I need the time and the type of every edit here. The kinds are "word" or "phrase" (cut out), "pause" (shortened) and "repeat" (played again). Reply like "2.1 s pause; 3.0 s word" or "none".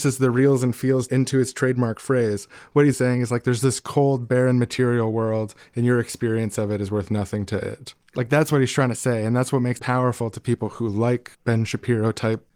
1.1 s word; 2.9 s word; 9.8 s word; 11.3 s pause